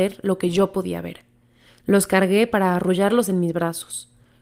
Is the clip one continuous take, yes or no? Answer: yes